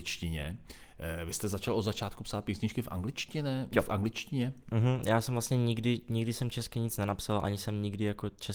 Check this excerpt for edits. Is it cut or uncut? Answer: uncut